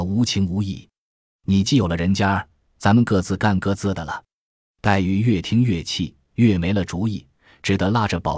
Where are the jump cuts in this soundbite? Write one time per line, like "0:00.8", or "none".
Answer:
none